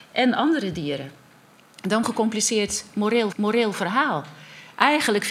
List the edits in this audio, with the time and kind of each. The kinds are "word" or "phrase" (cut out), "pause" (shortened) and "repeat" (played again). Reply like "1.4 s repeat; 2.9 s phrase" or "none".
2.0 s phrase; 3.3 s repeat